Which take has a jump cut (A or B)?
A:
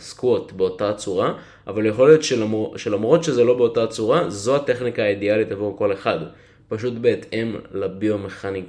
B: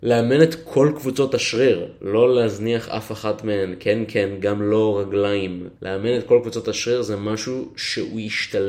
B